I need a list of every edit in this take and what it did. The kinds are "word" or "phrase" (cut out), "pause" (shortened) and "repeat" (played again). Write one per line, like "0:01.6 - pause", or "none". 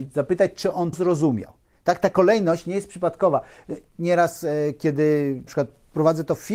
0:00.9 - word
0:03.9 - pause
0:05.5 - word